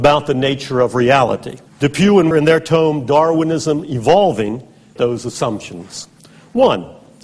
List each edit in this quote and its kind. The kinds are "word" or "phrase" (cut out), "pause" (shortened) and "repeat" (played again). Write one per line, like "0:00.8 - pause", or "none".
0:01.7 - pause
0:02.3 - word
0:05.0 - word